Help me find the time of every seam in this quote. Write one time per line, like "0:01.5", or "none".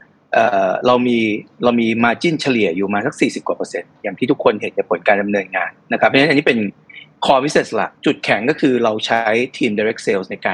0:08.0